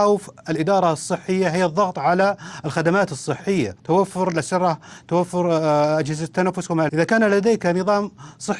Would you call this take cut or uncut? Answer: cut